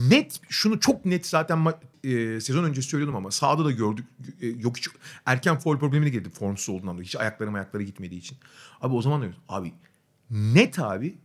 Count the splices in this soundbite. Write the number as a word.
zero